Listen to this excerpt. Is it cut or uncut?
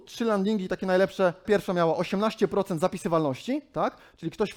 cut